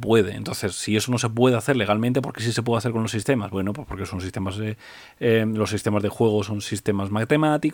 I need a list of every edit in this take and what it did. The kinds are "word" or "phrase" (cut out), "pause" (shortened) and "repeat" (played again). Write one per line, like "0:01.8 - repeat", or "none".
none